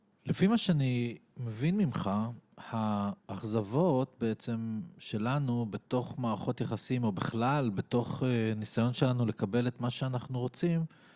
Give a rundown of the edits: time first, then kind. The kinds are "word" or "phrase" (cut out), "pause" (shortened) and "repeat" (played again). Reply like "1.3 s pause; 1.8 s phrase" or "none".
3.2 s pause